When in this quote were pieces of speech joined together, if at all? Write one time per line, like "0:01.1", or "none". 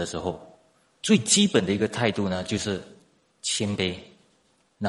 none